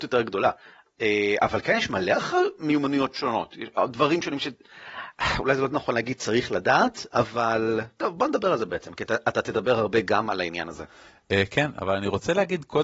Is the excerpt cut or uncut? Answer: uncut